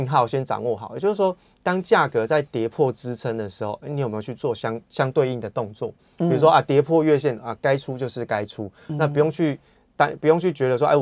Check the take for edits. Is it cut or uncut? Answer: uncut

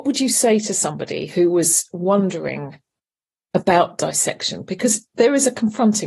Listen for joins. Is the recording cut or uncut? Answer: uncut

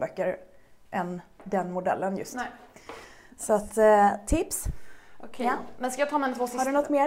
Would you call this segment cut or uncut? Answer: uncut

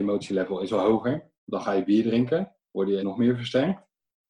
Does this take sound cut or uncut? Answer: cut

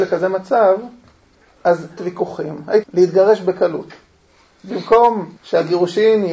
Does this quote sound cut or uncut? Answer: cut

